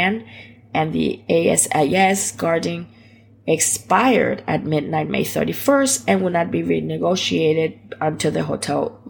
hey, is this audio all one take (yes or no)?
yes